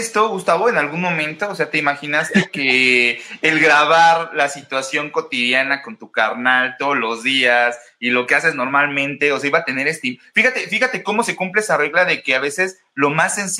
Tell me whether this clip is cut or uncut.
uncut